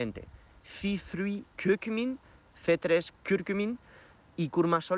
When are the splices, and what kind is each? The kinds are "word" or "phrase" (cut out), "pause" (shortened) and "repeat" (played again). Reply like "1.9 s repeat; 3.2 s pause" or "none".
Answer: 1.5 s pause; 3.2 s pause